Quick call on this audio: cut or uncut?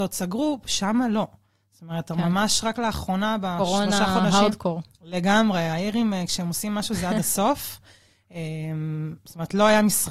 uncut